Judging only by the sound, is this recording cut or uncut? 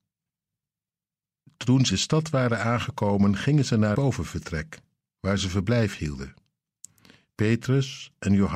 cut